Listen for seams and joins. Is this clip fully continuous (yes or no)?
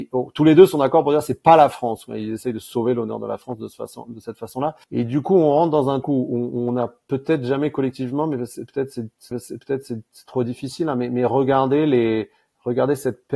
no